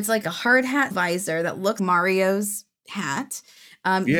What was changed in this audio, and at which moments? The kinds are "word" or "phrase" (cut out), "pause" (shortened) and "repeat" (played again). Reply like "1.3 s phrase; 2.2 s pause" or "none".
0.9 s word; 1.8 s word